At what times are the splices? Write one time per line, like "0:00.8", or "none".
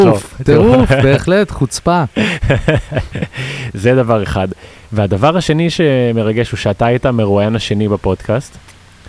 none